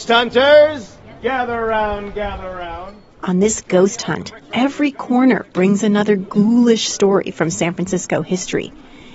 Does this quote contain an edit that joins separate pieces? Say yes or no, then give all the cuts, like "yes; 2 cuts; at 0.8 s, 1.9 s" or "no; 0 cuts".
no; 0 cuts